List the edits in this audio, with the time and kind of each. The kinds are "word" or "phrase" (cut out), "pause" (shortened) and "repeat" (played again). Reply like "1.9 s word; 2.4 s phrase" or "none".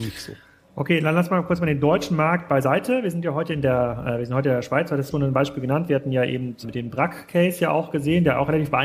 5.1 s phrase; 6.6 s word